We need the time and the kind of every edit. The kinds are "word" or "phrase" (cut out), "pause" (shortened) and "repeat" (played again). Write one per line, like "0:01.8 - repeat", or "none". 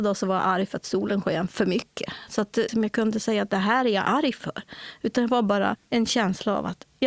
0:02.7 - phrase
0:05.8 - pause